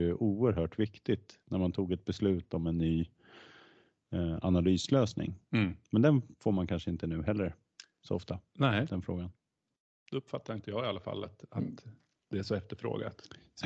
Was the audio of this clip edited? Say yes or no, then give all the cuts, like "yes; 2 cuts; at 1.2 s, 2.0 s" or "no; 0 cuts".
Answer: no; 0 cuts